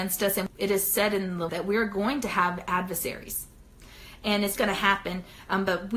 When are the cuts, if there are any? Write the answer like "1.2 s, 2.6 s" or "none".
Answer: 1.5 s, 4.6 s